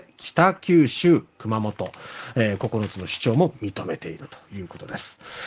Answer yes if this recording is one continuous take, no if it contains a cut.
yes